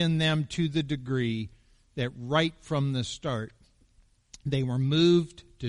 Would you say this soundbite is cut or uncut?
uncut